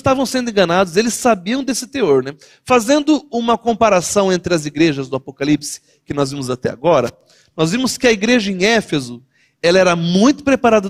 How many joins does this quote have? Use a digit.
0